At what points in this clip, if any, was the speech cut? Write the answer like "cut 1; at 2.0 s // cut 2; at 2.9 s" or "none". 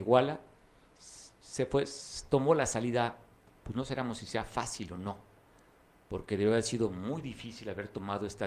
none